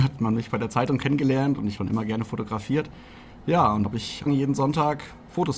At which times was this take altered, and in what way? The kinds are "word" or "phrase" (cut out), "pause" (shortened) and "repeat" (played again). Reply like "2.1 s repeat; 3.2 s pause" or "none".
1.8 s word; 3.8 s word; 4.3 s word